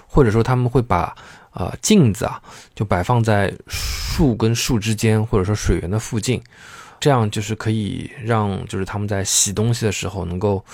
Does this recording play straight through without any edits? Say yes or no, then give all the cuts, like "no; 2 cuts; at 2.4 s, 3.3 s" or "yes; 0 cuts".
no; 1 cut; at 7.0 s